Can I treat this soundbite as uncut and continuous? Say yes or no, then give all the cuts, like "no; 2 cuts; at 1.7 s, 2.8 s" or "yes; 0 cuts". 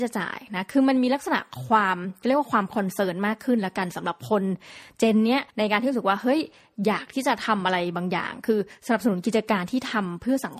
no; 1 cut; at 5.5 s